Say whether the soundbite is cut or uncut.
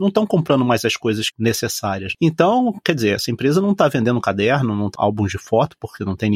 cut